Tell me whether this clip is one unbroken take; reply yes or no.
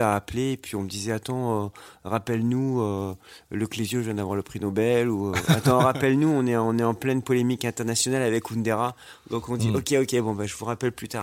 yes